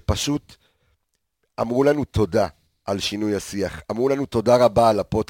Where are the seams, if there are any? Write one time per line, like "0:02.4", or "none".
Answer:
0:02.7